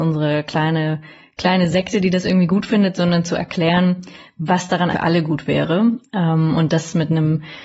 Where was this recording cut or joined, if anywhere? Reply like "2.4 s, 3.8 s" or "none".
4.9 s